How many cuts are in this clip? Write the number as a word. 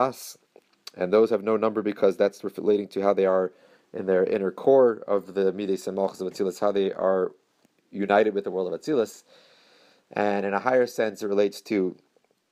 zero